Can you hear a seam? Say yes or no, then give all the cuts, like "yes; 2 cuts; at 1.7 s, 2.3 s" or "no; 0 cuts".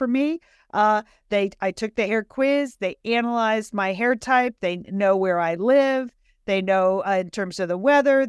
no; 0 cuts